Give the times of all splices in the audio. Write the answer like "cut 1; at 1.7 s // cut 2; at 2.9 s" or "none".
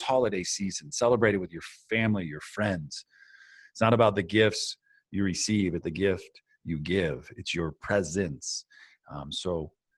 cut 1; at 5.8 s